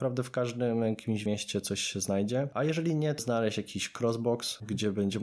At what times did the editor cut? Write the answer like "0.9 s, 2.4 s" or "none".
1.3 s, 3.2 s